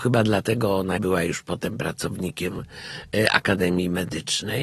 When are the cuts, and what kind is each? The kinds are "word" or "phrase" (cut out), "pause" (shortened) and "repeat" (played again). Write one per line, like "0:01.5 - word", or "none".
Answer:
0:01.0 - word